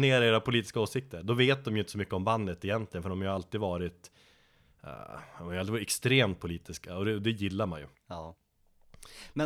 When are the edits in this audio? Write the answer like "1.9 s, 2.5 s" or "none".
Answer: 7.9 s